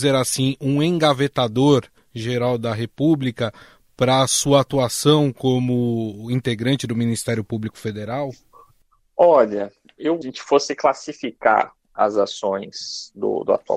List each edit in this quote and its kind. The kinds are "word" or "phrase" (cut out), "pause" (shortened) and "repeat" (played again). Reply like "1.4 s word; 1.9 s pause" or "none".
10.2 s phrase